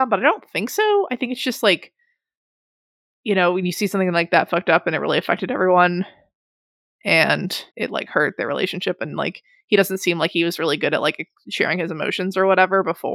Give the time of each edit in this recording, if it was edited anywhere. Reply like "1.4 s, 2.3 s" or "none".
7.7 s

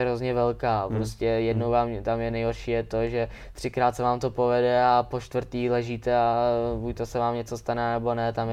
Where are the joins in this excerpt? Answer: none

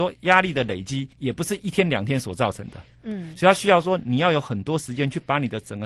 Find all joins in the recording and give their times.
1.1 s

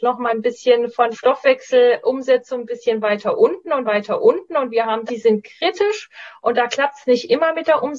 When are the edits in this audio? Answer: 1.1 s, 3.9 s, 5.1 s

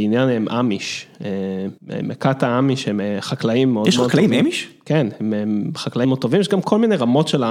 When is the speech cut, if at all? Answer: 1.8 s, 6.0 s

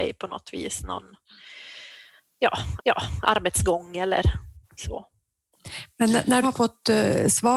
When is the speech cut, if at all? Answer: 2.8 s, 4.6 s, 6.4 s

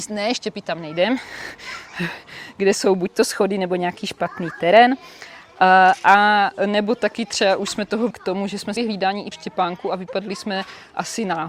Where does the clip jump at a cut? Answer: 8.1 s, 8.8 s, 9.3 s

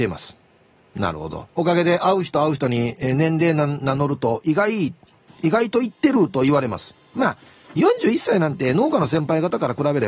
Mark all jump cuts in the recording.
1.5 s

